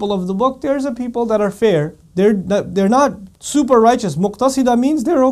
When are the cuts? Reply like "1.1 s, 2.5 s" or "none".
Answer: 2.0 s